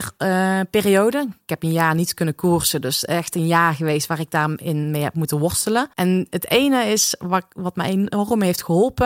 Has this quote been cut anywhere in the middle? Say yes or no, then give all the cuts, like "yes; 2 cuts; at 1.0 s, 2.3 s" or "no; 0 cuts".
yes; 1 cut; at 5.9 s